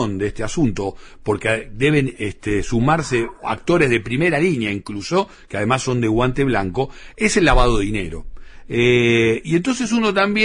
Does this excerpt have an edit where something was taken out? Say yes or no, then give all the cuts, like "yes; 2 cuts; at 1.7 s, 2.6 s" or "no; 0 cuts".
no; 0 cuts